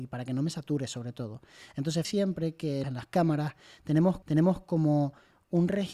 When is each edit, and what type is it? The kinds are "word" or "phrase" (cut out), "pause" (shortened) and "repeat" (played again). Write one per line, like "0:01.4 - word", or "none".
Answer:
0:02.0 - word
0:02.8 - phrase
0:04.2 - repeat